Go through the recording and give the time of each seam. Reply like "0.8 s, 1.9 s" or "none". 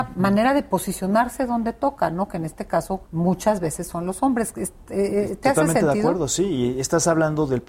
3.1 s

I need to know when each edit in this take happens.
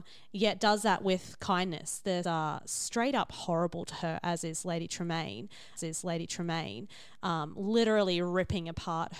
2.2 s, 5.8 s

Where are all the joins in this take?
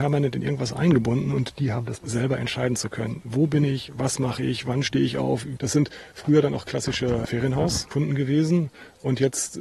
2.0 s

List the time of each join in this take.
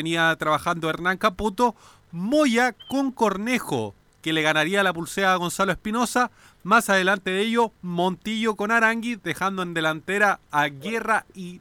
none

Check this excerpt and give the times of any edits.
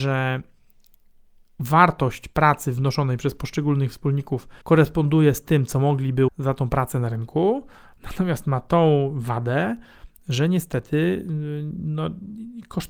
4.6 s, 6.3 s

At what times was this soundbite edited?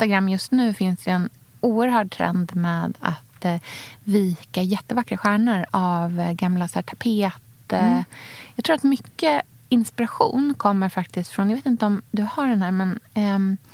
none

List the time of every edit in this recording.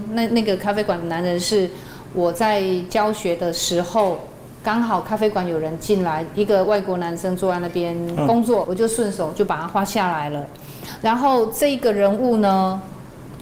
8.6 s

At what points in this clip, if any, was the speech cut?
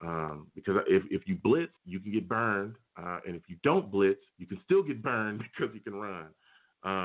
1.8 s, 4.3 s

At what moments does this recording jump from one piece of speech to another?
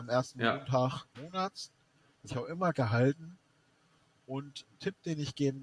1.1 s, 2.3 s, 2.7 s

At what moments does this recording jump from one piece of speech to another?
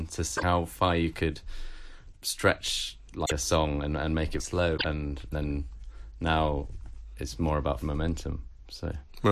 2.1 s, 4.4 s, 5.3 s, 7.8 s

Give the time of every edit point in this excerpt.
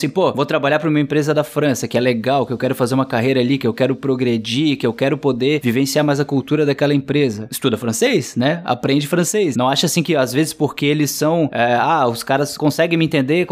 none

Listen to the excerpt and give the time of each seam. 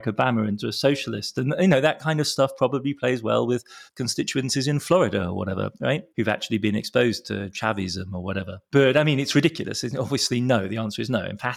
3.9 s, 6.1 s, 8.7 s

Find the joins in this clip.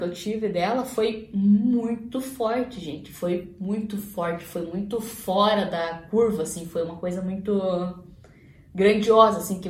none

